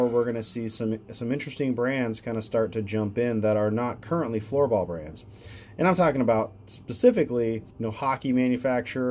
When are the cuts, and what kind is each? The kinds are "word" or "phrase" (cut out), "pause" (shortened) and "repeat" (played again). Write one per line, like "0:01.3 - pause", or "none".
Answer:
0:07.7 - pause